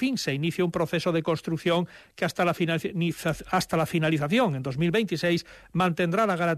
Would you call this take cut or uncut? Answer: uncut